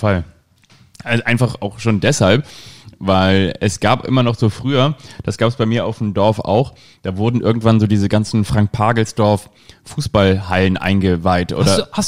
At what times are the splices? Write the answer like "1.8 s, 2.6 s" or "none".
none